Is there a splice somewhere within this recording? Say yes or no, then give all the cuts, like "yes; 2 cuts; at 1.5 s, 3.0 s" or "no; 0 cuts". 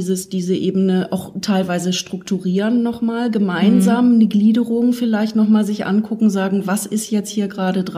no; 0 cuts